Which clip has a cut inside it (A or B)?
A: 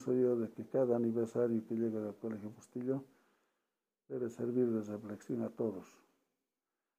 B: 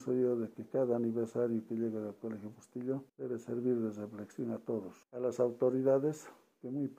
B